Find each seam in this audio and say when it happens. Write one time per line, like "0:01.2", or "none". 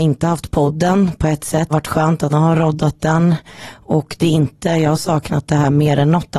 0:01.7
0:02.3